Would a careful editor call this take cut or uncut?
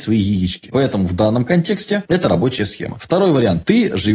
uncut